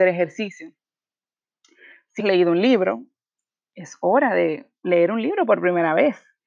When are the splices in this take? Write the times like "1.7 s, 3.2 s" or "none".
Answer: 2.2 s